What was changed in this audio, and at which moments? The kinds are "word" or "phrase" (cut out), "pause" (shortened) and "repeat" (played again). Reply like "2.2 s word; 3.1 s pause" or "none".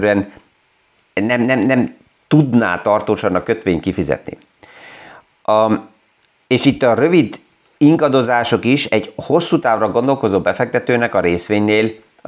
none